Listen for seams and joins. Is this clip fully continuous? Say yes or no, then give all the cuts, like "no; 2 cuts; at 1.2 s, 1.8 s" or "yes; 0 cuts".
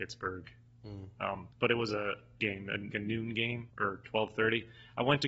no; 4 cuts; at 1.5 s, 2.4 s, 2.9 s, 3.7 s